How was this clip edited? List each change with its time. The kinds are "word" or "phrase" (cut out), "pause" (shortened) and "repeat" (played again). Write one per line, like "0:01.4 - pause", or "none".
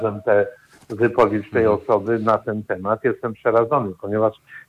none